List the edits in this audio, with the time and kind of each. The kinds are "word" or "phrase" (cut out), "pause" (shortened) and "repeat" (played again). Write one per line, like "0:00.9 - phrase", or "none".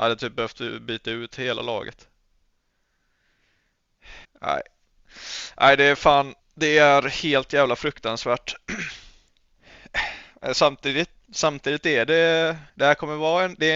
0:04.2 - pause
0:06.4 - pause
0:11.2 - word
0:12.7 - pause